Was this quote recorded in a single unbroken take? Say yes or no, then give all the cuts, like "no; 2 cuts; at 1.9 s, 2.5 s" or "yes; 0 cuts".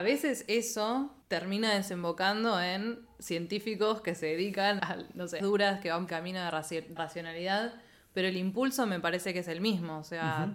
no; 5 cuts; at 1.2 s, 4.8 s, 5.4 s, 6.1 s, 7.0 s